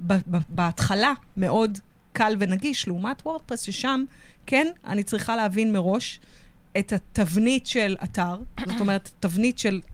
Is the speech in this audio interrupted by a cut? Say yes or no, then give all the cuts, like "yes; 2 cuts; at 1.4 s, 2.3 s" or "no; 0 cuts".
no; 0 cuts